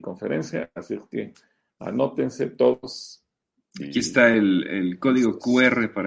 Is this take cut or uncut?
uncut